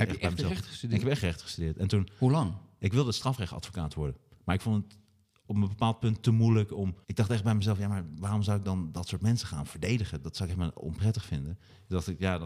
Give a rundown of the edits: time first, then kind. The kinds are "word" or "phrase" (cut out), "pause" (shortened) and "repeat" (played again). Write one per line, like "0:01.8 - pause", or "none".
0:07.0 - pause

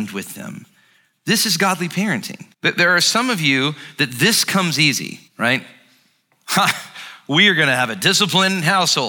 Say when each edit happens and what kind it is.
0:02.5 - pause
0:05.3 - pause

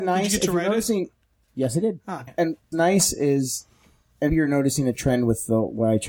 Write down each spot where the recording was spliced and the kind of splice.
0:02.3 - word
0:02.7 - word
0:04.3 - word

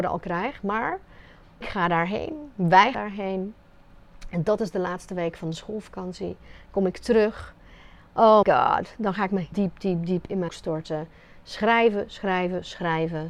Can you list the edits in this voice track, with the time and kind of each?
0:01.6 - word
0:02.9 - word
0:08.4 - word
0:09.5 - word
0:10.5 - word

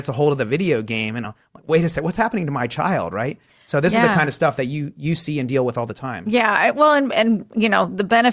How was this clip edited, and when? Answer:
none

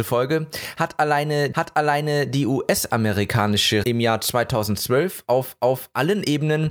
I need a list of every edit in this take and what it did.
0:01.5 - repeat
0:03.8 - word
0:05.6 - repeat

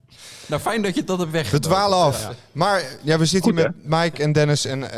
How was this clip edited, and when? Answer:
0:03.8 - word

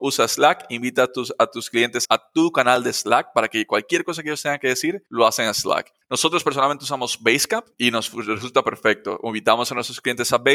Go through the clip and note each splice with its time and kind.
0:02.0 - word
0:05.1 - pause
0:07.7 - pause

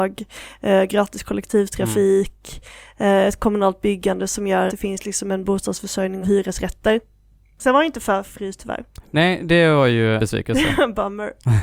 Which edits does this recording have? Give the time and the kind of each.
0:04.7 - word
0:06.2 - word
0:08.6 - word
0:10.2 - word

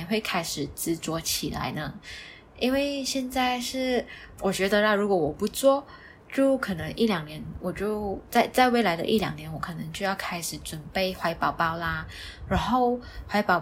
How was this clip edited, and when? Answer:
0:04.4 - word

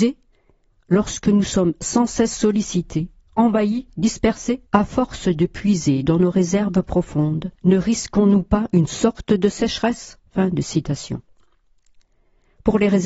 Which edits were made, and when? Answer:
0:04.7 - pause
0:07.5 - pause
0:10.3 - pause

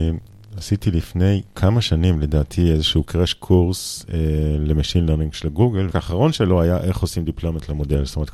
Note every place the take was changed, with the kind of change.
0:03.0 - phrase
0:05.9 - word

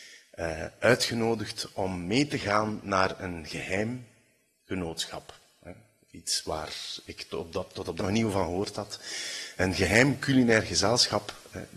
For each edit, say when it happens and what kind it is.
0:08.0 - word

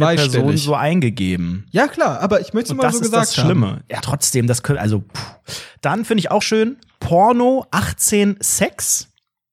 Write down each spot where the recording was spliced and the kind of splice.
0:04.0 - word
0:06.4 - word

